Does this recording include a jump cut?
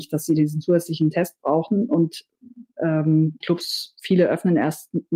yes; 1 cut; at 3.4 s

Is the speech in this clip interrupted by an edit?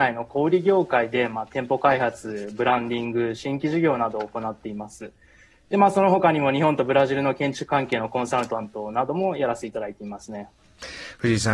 no; 0 cuts

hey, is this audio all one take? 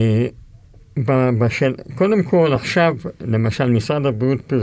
yes; 0 cuts

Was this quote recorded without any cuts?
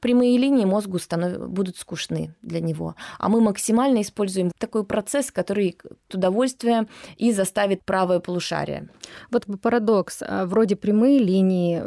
no; 4 cuts; at 4.5 s, 6.1 s, 7.8 s, 9.5 s

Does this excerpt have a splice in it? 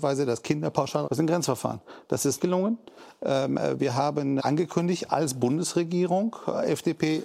yes; 3 cuts; at 1.1 s, 2.4 s, 4.4 s

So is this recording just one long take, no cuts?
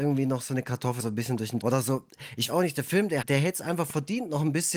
no; 4 cuts; at 1.0 s, 1.6 s, 2.5 s, 3.2 s

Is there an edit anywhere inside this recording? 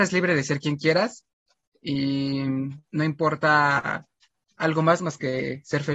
yes; 1 cut; at 2.8 s

